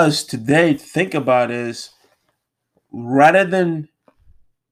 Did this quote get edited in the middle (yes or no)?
no